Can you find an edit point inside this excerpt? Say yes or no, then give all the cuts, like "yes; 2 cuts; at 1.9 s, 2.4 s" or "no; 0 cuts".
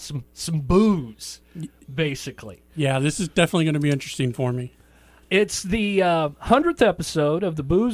no; 0 cuts